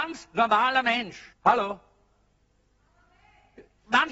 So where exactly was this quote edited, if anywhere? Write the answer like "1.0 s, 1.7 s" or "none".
1.3 s

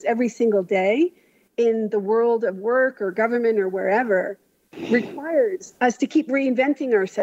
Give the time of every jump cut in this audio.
none

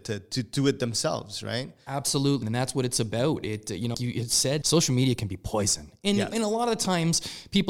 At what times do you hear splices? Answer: 2.4 s, 3.9 s, 4.6 s, 6.3 s

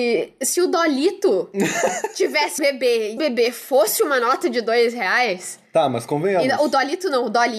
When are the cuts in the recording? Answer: 2.6 s, 3.2 s

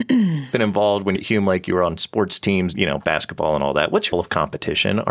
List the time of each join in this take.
1.2 s, 2.7 s, 4.1 s

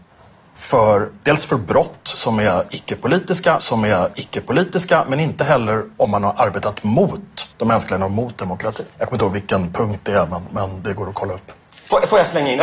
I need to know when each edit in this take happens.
3.6 s, 7.5 s, 8.0 s, 8.9 s

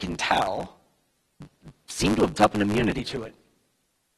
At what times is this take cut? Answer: 2.3 s

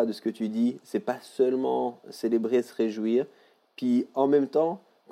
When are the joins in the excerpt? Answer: none

